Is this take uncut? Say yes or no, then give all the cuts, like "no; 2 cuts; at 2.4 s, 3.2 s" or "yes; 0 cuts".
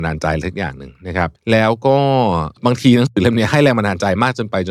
no; 2 cuts; at 1.4 s, 2.6 s